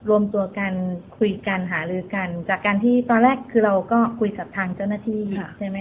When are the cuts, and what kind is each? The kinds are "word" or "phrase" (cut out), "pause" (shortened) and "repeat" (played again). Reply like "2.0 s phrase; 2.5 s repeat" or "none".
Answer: 1.1 s pause